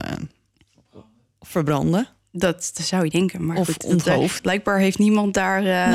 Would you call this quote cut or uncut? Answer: cut